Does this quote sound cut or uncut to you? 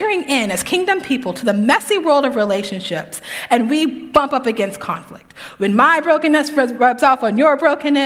uncut